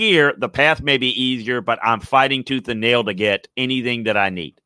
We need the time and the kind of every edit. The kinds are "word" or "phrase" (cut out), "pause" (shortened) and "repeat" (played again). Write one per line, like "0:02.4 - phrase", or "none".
0:03.5 - pause

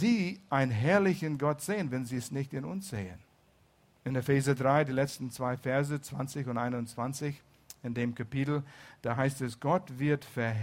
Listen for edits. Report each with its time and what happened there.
0:03.7 - pause

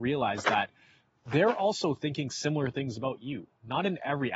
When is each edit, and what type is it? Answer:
none

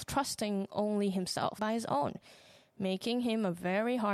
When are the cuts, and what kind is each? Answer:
0:01.6 - phrase

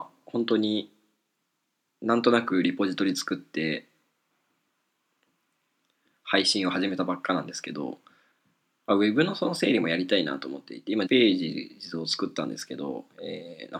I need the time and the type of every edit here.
0:11.1 - word

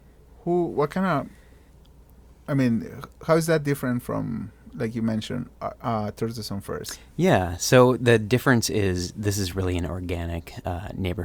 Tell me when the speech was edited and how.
none

